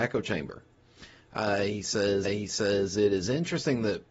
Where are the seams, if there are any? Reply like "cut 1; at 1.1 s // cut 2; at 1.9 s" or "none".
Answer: cut 1; at 2.2 s